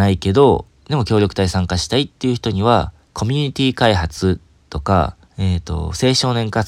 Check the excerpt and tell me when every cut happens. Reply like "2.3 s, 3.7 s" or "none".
3.0 s, 5.2 s